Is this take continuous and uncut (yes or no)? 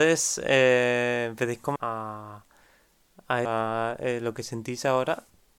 no